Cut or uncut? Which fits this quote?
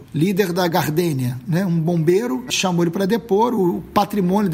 cut